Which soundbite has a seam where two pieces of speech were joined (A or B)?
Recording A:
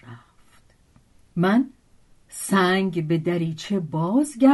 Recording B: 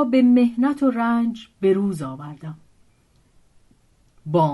A